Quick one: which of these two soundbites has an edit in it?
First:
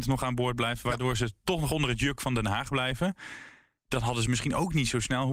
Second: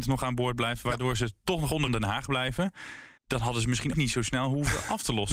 second; 3 cuts; at 1.9 s, 3.2 s, 3.9 s

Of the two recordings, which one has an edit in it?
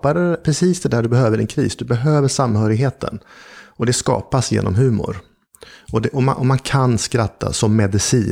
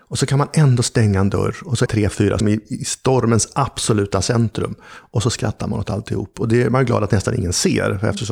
second; 2 cuts; at 1.9 s, 2.4 s

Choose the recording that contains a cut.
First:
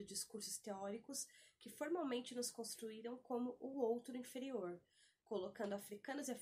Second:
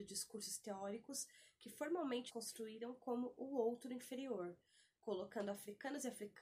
second; 1 cut; at 2.3 s

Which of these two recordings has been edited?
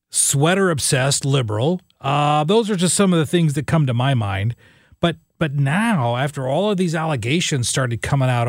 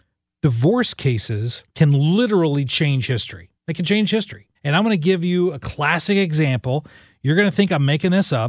second; 3 cuts; at 1.7 s, 3.6 s, 4.5 s

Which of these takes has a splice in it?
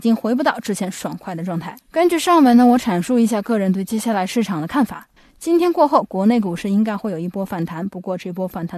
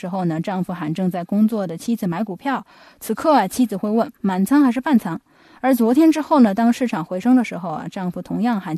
first; 2 cuts; at 1.8 s, 5.2 s

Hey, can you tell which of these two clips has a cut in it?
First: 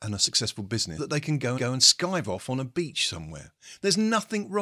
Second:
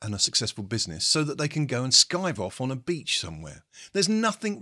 first; 2 cuts; at 1.0 s, 1.6 s

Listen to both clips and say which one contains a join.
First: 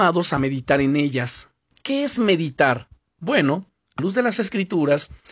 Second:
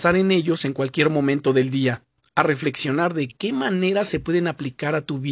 first; 1 cut; at 4.0 s

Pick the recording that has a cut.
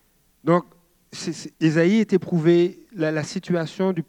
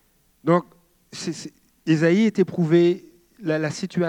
first; 2 cuts; at 1.5 s, 2.9 s

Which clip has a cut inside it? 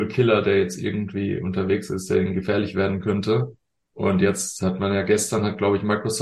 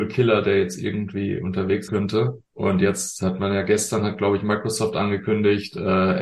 second; 2 cuts; at 1.9 s, 2.5 s

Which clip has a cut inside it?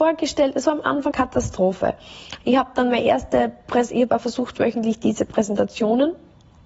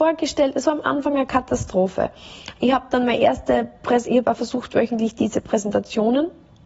first; 1 cut; at 1.1 s

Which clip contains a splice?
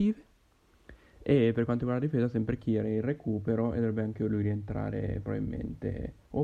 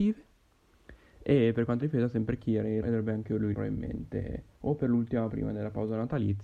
second; 4 cuts; at 1.8 s, 2.8 s, 3.5 s, 5.3 s

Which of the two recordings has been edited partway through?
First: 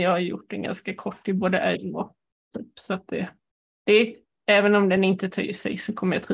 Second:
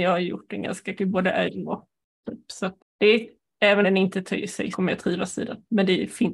second; 4 cuts; at 1.0 s, 2.8 s, 3.8 s, 4.7 s

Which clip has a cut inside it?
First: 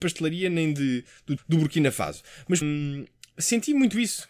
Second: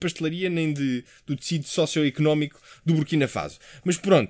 first; 2 cuts; at 1.4 s, 2.6 s

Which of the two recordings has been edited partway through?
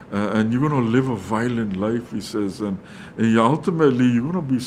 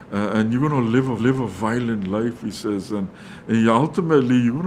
second; 1 cut; at 1.2 s

